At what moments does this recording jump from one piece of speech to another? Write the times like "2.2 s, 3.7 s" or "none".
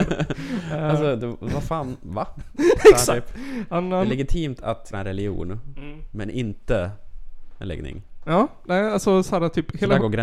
4.9 s